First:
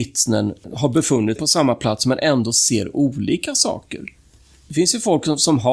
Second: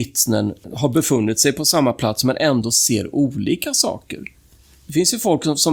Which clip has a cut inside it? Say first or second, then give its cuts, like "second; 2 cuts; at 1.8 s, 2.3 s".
first; 1 cut; at 1.4 s